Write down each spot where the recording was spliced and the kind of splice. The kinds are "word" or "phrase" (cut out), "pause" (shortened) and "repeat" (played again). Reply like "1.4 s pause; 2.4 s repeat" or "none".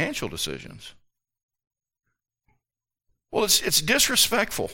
none